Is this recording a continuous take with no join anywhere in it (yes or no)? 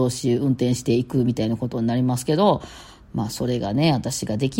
yes